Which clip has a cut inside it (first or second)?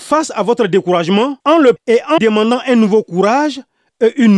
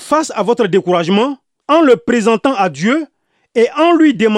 first